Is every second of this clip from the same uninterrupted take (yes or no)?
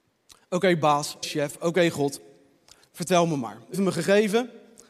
no